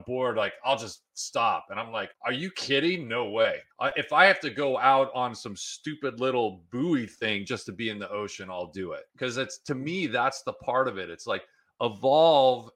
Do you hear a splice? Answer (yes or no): yes